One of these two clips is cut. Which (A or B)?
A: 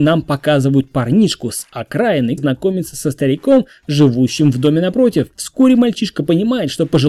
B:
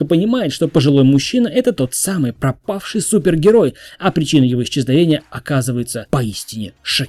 A